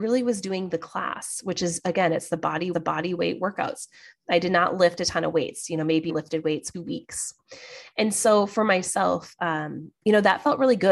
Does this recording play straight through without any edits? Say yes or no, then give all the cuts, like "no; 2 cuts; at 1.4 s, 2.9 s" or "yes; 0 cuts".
no; 3 cuts; at 2.7 s, 6.1 s, 6.7 s